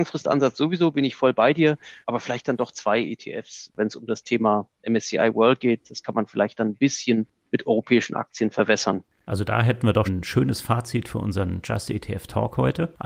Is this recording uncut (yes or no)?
no